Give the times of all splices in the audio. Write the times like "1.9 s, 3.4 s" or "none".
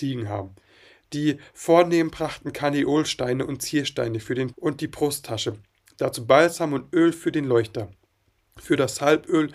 4.5 s